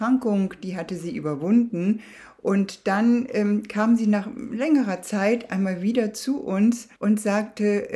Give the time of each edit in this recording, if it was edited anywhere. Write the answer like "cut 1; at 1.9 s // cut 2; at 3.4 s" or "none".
cut 1; at 6.9 s